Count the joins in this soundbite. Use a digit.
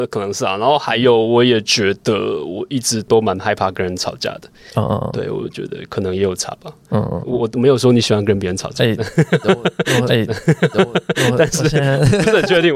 1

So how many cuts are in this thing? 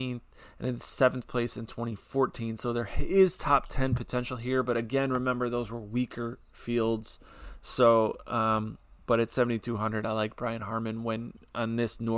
0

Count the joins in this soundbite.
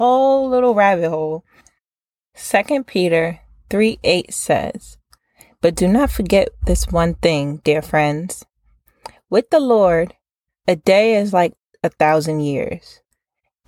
0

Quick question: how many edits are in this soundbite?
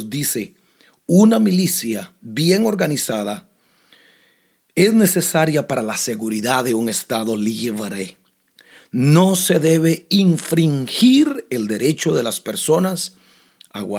0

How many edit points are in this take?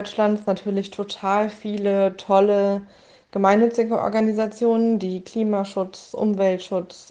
0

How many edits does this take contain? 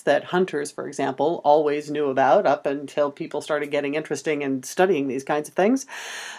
0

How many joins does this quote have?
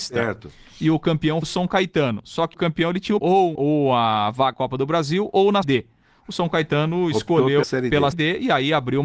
8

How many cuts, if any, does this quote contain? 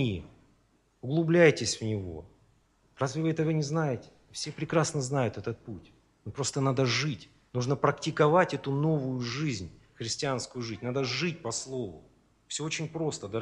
0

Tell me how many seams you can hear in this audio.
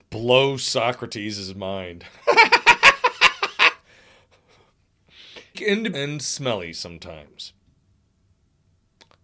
2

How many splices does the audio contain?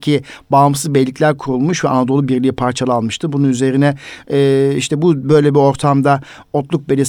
0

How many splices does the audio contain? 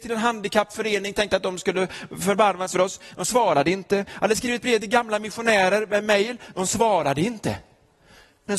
1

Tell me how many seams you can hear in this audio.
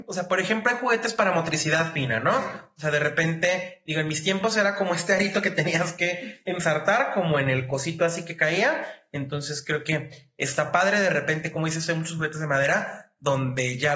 0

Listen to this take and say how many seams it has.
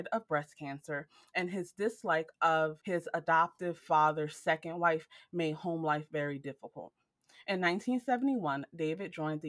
0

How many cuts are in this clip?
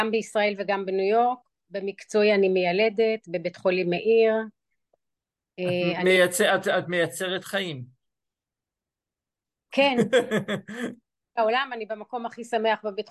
0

